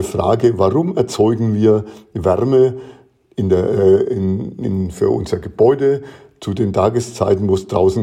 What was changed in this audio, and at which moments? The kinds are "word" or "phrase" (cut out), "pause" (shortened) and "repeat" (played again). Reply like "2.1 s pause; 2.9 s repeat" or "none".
none